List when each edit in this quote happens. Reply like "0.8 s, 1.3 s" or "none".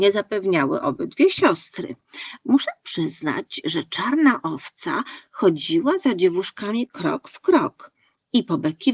none